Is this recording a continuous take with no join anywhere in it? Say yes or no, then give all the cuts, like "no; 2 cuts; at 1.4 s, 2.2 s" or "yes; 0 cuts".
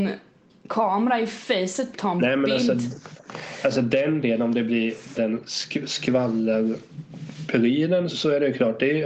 no; 3 cuts; at 1.9 s, 5.1 s, 8.1 s